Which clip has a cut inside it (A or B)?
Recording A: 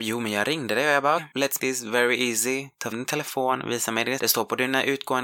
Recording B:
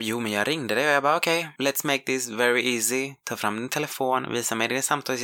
A